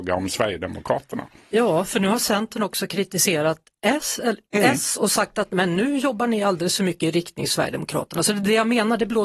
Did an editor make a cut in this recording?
no; 0 cuts

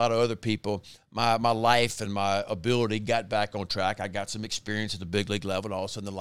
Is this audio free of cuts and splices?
yes; 0 cuts

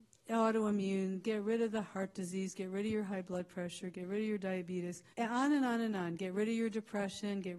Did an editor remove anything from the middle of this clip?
yes; 1 cut; at 5.1 s

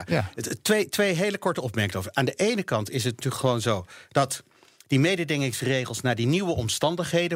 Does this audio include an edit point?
no; 0 cuts

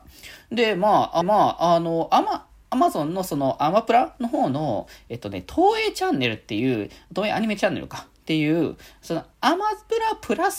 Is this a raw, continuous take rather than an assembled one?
no; 2 cuts; at 1.2 s, 9.3 s

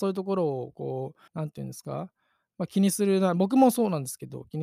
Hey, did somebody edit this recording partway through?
yes; 1 cut; at 1.3 s

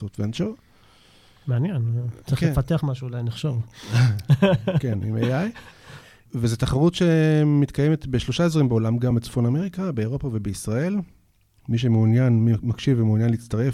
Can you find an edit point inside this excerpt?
no; 0 cuts

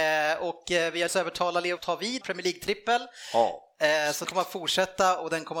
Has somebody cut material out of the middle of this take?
yes; 4 cuts; at 1.1 s, 1.8 s, 2.2 s, 4.2 s

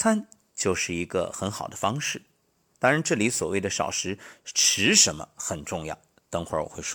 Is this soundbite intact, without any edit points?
yes; 0 cuts

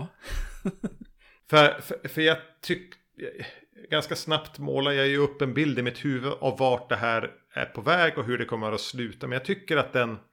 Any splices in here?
no; 0 cuts

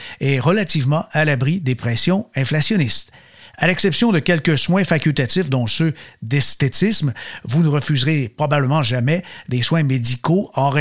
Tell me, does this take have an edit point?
no; 0 cuts

